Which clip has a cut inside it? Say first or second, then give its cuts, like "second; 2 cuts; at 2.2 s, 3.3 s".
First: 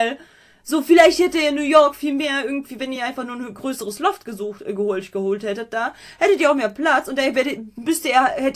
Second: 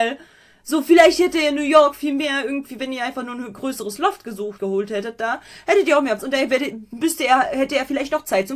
second; 2 cuts; at 4.6 s, 6.2 s